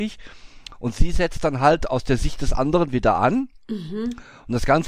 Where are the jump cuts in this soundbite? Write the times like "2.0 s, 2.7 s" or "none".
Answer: 3.6 s